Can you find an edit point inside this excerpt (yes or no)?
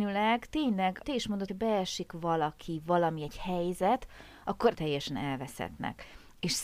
yes